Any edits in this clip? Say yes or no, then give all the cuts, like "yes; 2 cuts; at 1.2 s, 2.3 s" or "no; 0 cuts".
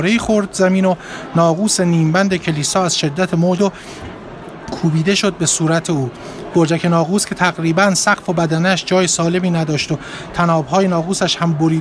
yes; 1 cut; at 3.6 s